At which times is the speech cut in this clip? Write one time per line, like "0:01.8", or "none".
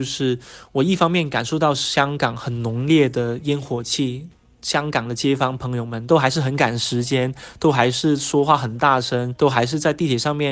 none